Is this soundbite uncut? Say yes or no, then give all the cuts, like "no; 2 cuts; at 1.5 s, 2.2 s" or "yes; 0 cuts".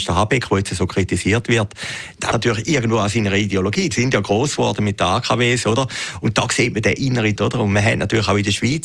no; 3 cuts; at 2.3 s, 3.9 s, 7.4 s